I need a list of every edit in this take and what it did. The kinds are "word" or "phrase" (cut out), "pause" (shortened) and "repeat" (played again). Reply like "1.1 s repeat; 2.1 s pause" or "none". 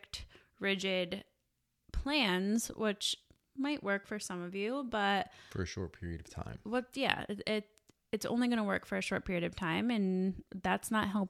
none

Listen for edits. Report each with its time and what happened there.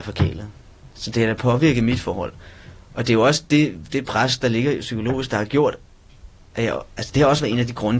none

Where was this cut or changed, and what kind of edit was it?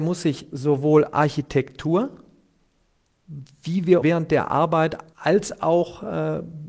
4.0 s word; 5.1 s pause

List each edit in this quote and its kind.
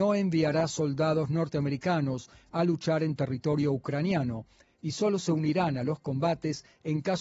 none

